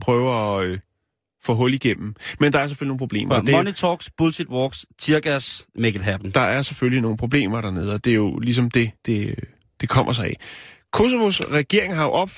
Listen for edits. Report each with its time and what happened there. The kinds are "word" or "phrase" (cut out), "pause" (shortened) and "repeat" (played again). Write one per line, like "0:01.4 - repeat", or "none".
0:09.0 - pause